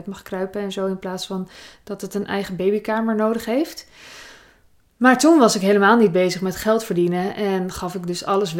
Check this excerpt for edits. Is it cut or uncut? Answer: uncut